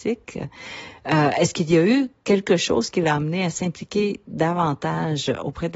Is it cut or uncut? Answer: uncut